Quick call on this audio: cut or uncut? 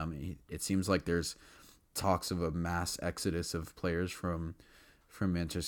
uncut